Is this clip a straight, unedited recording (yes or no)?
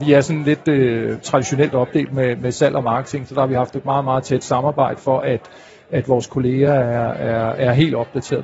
yes